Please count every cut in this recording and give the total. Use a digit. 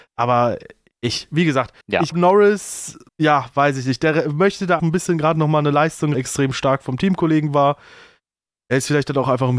5